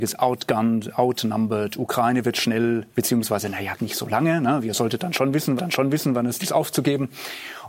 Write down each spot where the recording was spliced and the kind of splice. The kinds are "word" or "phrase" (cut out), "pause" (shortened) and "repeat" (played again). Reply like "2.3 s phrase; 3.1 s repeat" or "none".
2.9 s word; 3.8 s word; 5.6 s repeat; 6.4 s word